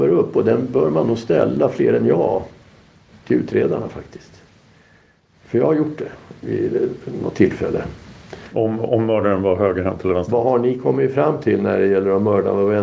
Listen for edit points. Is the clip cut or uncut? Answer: uncut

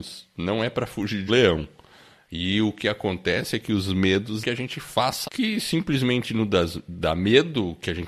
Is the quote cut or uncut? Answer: cut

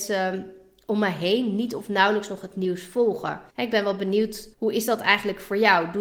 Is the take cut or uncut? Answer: cut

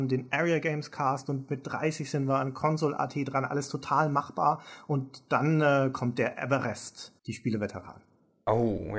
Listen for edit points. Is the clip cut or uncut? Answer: cut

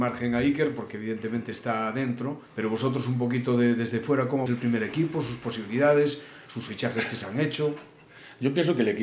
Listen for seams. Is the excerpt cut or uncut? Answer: cut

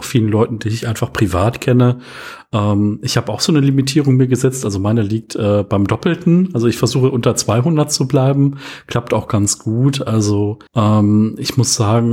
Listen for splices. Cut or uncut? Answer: cut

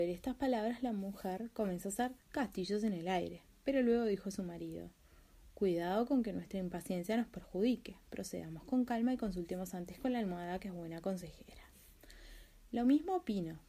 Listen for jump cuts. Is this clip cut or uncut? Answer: cut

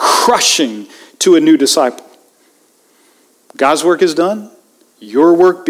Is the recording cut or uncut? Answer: uncut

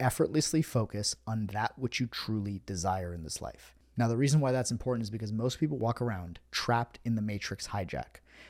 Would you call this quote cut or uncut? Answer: uncut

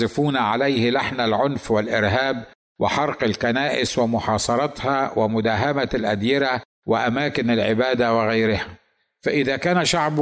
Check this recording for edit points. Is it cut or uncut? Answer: uncut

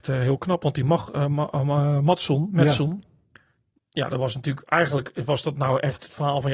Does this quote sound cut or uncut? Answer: uncut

